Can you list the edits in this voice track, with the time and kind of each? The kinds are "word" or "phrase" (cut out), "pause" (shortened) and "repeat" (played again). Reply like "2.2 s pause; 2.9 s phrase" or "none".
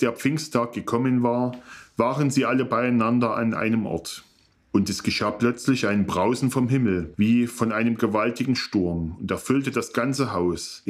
none